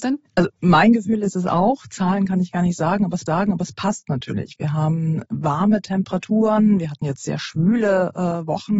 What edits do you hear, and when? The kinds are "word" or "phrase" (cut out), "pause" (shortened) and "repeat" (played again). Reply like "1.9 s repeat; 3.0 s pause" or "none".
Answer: 3.3 s repeat